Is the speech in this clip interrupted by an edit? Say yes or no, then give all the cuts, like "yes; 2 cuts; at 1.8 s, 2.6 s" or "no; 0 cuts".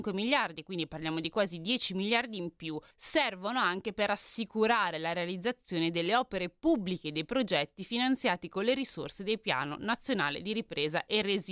yes; 1 cut; at 2.9 s